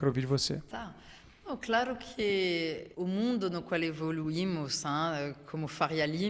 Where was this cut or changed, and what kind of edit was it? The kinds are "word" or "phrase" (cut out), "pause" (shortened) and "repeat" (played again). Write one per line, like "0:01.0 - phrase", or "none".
0:02.9 - pause